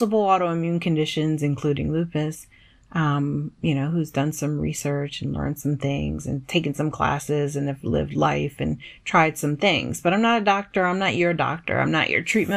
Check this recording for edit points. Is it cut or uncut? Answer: uncut